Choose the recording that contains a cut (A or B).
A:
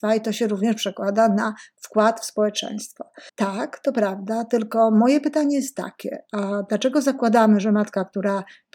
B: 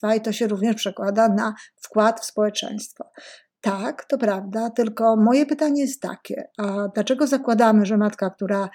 A